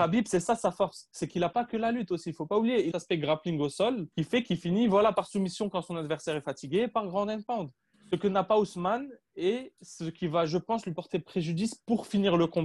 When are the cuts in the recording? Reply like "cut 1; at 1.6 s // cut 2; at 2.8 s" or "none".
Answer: cut 1; at 2.9 s // cut 2; at 4.1 s // cut 3; at 7.9 s